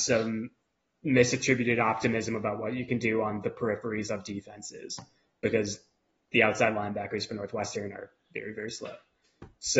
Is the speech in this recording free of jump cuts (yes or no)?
yes